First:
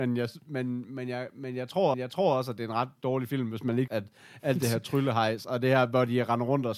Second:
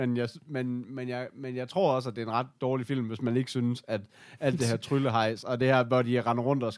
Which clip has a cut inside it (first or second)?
first